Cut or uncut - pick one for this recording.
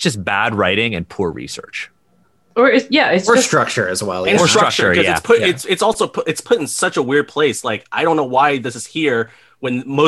uncut